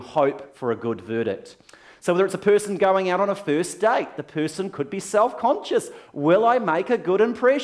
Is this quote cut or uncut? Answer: uncut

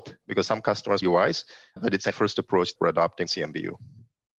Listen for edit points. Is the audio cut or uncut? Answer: cut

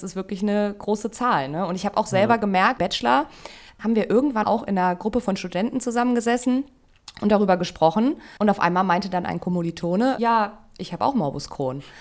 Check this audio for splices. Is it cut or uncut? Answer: cut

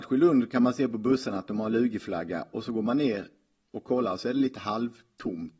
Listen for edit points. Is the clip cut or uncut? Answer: uncut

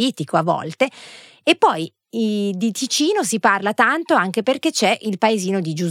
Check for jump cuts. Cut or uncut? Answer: uncut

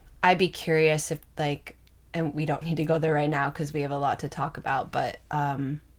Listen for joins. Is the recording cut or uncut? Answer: cut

